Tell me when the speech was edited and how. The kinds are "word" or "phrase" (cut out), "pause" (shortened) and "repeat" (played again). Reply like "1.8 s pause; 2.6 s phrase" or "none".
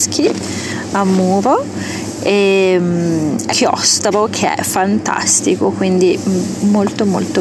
3.5 s word